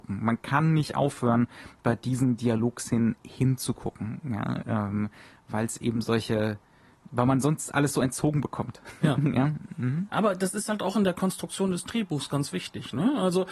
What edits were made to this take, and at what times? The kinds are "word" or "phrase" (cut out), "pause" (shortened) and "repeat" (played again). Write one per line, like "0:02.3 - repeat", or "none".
none